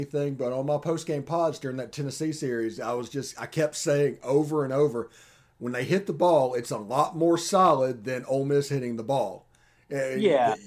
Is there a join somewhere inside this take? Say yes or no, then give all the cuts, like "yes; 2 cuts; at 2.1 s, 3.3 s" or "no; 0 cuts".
no; 0 cuts